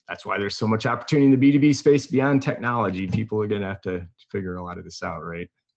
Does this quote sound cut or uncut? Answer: uncut